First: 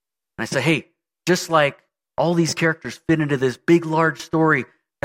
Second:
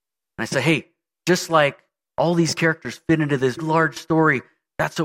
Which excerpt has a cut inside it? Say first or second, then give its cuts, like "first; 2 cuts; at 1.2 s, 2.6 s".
second; 1 cut; at 3.6 s